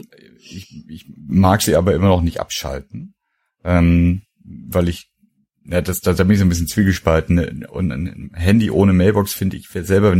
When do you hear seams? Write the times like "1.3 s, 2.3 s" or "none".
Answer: none